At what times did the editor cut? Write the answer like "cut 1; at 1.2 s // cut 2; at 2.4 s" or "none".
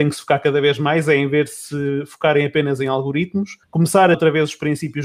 cut 1; at 3.6 s // cut 2; at 4.1 s